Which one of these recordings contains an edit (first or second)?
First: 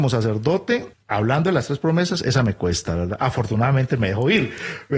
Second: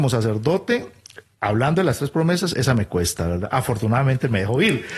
first